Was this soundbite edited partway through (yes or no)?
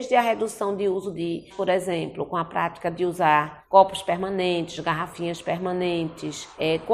yes